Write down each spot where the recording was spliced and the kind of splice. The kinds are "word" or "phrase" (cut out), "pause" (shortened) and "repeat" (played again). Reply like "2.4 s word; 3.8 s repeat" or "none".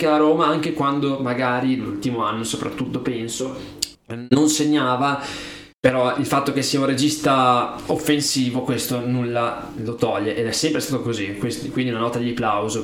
3.9 s pause; 5.7 s pause